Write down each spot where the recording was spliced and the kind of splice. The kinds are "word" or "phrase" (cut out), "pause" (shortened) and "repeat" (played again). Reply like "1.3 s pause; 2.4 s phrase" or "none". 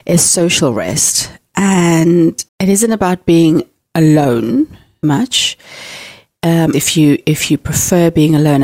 2.5 s pause; 5.0 s word; 6.7 s word